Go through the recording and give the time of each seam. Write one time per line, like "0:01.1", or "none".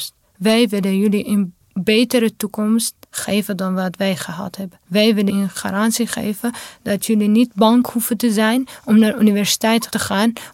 0:01.6
0:03.0
0:04.8
0:05.3